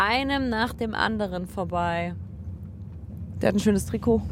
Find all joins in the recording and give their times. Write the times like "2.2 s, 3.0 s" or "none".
none